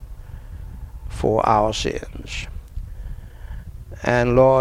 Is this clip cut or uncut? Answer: uncut